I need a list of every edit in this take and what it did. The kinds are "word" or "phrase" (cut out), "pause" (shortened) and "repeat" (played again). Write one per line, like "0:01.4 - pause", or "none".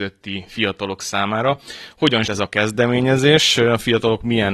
0:02.2 - word